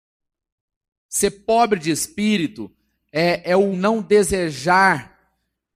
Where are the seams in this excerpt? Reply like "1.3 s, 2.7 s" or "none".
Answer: 3.7 s